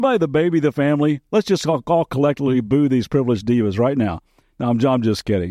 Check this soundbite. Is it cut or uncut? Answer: uncut